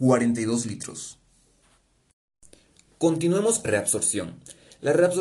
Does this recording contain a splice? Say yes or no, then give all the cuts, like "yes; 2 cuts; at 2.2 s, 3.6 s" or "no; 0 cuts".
yes; 1 cut; at 3.6 s